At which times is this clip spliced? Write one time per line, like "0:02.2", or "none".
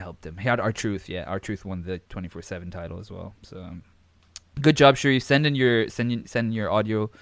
0:02.0